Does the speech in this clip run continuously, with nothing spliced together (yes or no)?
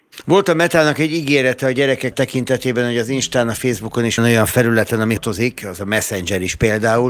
no